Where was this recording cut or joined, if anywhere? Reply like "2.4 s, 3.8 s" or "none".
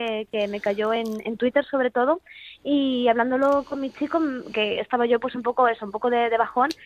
none